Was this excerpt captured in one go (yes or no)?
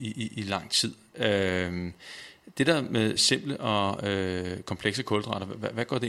yes